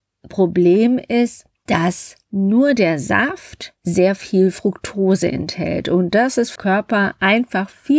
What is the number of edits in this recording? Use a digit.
1